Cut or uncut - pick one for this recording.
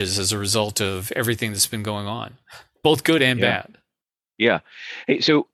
uncut